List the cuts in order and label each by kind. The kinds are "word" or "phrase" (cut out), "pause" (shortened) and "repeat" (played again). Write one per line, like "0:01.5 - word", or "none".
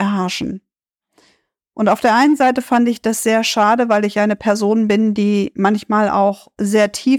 none